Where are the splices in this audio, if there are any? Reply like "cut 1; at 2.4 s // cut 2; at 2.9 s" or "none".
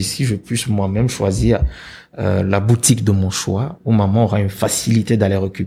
none